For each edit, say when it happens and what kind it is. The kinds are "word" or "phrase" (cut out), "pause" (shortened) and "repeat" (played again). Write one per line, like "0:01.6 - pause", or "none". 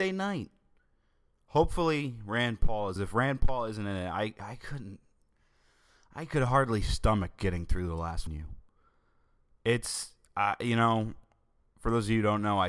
0:03.0 - phrase
0:08.3 - phrase